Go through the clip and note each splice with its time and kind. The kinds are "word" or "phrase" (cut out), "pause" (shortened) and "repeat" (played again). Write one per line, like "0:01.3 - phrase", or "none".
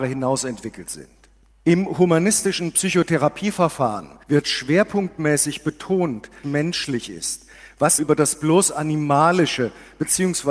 0:01.5 - pause
0:04.2 - pause
0:06.4 - phrase
0:08.0 - word